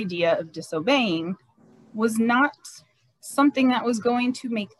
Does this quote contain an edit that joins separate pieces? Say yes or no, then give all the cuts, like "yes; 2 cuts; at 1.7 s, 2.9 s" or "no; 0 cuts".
no; 0 cuts